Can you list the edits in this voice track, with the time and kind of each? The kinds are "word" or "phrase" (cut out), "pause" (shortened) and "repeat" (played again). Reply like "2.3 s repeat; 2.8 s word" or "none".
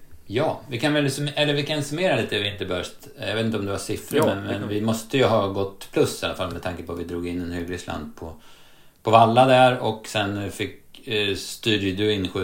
none